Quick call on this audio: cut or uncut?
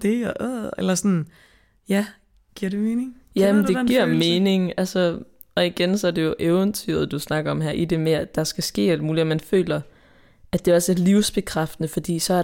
uncut